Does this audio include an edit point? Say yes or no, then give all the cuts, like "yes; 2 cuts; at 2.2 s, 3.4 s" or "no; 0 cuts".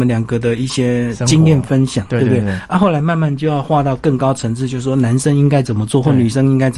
no; 0 cuts